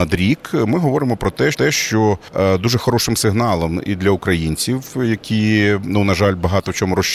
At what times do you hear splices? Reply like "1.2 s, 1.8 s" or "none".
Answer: 1.5 s